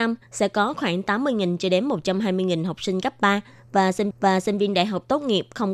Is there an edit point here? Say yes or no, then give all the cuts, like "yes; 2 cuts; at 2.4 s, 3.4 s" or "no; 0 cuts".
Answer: yes; 1 cut; at 4.1 s